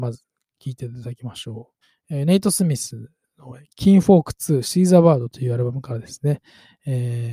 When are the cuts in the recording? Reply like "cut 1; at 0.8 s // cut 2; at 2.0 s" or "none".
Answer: cut 1; at 1.8 s